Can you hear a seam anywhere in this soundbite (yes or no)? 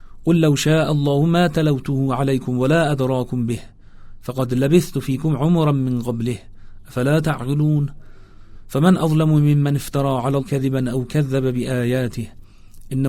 yes